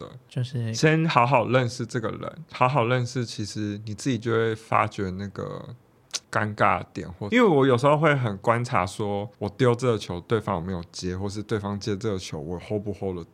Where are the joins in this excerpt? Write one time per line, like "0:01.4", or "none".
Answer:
0:06.2
0:09.3